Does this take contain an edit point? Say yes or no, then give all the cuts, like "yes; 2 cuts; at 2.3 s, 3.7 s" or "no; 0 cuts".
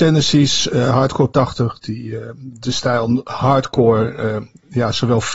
yes; 1 cut; at 1.3 s